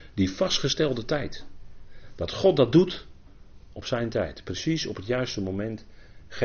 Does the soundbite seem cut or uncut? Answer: cut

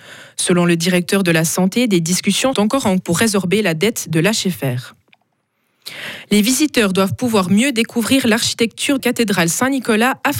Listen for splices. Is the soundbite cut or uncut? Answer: cut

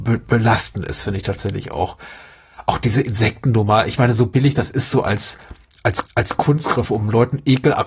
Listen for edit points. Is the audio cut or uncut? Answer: cut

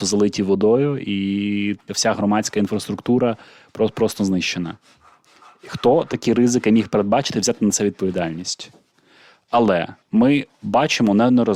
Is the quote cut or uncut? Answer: cut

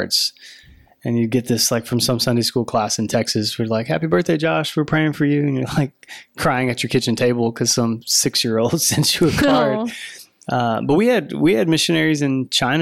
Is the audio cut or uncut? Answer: uncut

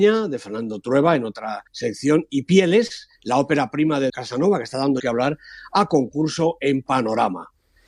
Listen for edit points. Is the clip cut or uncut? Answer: cut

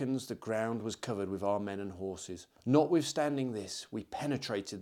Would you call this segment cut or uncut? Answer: cut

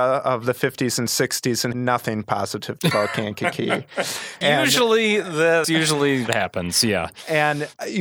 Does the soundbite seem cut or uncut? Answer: cut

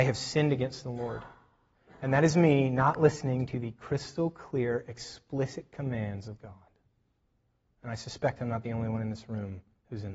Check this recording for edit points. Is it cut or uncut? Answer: uncut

